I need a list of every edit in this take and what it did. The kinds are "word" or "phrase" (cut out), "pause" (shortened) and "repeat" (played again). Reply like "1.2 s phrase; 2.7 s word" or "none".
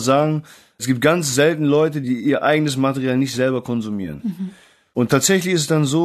none